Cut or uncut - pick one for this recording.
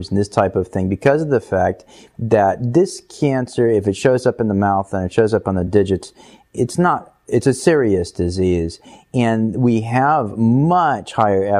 uncut